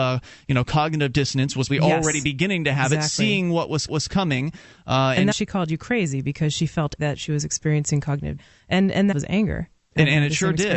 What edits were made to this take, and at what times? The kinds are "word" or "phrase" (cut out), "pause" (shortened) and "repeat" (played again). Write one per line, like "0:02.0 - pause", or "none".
0:01.7 - word
0:03.9 - repeat
0:05.3 - phrase
0:07.0 - word
0:08.4 - phrase
0:09.1 - phrase